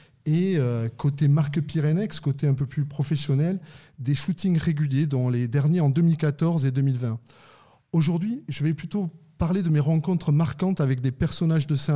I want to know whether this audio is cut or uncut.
uncut